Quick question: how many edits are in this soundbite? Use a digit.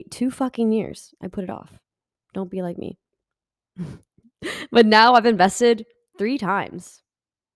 0